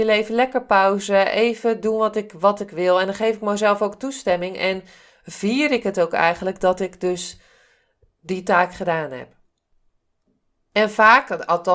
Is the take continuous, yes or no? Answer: yes